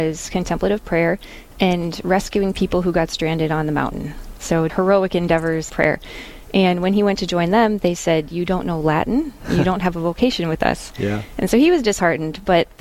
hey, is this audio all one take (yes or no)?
no